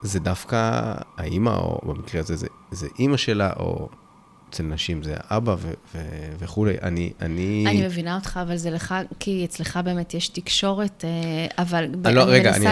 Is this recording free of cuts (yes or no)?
yes